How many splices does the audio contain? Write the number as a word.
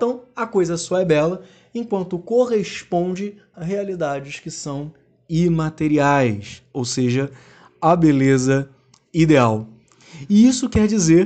one